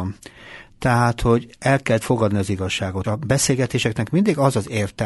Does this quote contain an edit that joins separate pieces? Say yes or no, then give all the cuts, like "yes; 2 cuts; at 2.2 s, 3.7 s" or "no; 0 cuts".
yes; 2 cuts; at 2.0 s, 3.0 s